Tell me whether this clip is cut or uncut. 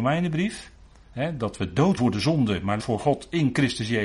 cut